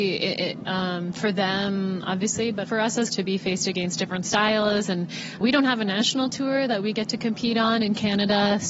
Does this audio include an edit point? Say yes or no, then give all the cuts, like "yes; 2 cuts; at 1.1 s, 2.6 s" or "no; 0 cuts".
yes; 3 cuts; at 2.6 s, 3.1 s, 5.4 s